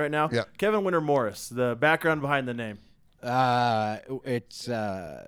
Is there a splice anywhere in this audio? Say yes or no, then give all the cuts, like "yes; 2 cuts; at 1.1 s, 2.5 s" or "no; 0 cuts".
no; 0 cuts